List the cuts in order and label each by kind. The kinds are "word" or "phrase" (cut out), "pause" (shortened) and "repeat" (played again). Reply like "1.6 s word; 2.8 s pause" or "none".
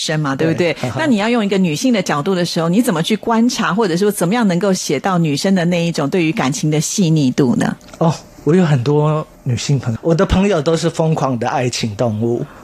10.0 s word